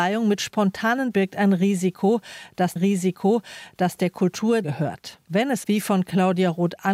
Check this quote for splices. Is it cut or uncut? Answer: cut